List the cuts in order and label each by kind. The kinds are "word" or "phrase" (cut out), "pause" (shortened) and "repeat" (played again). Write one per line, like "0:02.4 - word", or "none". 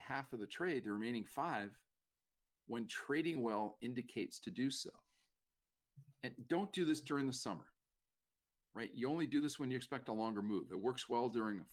none